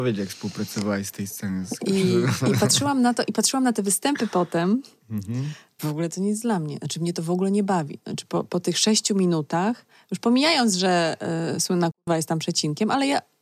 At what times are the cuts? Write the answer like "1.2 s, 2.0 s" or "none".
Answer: 5.8 s